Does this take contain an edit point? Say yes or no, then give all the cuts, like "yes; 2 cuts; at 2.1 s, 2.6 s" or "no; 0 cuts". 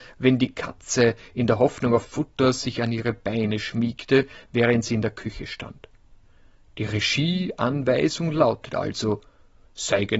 no; 0 cuts